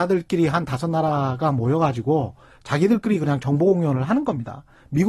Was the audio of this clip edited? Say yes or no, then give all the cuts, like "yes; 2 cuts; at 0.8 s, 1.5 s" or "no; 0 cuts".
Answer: no; 0 cuts